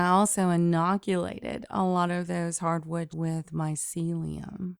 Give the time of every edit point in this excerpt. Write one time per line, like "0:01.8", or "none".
0:03.1